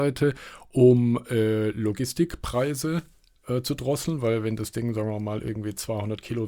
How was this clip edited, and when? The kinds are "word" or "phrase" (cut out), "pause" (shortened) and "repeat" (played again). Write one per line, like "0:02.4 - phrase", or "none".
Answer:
none